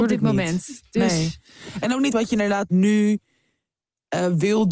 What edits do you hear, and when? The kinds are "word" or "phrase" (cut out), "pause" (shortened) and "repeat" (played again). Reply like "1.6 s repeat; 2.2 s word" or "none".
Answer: 2.1 s word; 2.7 s word